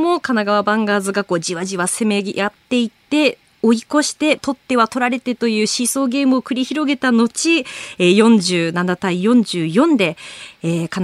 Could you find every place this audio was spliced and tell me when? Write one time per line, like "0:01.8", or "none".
0:04.4